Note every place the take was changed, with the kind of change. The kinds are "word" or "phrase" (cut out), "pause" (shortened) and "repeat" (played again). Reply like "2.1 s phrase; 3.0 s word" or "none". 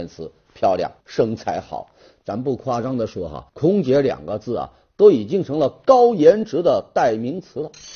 1.0 s phrase; 3.5 s word